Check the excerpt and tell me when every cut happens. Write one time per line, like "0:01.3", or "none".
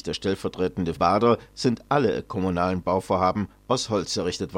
0:01.0